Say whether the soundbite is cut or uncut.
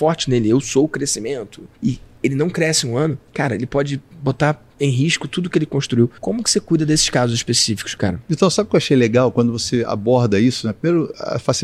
cut